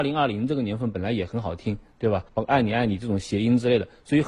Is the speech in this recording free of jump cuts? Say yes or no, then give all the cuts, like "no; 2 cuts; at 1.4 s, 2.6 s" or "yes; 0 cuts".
no; 1 cut; at 2.3 s